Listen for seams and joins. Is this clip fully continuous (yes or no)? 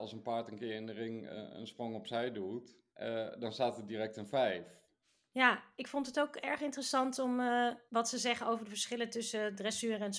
no